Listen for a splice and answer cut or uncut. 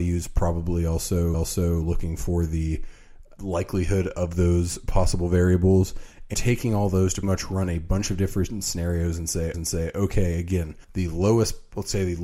cut